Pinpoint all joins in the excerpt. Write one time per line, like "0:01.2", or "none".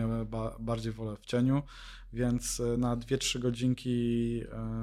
none